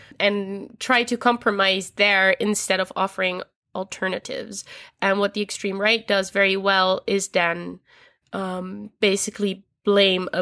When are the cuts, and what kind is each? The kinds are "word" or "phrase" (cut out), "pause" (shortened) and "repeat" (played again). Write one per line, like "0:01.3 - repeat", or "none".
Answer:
none